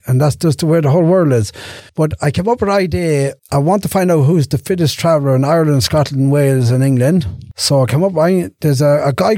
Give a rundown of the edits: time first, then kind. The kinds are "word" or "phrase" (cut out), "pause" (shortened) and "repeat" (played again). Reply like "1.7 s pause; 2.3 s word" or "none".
1.9 s pause; 3.4 s pause